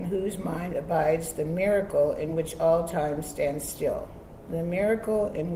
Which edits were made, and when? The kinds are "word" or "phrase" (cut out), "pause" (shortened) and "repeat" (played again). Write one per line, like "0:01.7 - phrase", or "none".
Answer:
none